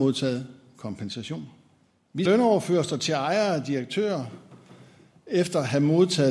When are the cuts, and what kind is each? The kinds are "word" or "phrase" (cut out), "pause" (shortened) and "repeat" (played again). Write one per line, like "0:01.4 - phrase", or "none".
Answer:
0:02.2 - word